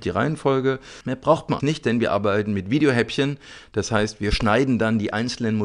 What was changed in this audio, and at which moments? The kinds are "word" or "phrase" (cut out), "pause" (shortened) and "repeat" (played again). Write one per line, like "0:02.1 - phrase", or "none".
0:01.6 - word